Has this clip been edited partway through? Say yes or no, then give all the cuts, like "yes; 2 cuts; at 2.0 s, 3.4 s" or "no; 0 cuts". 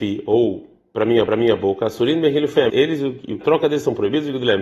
yes; 3 cuts; at 1.3 s, 2.7 s, 3.4 s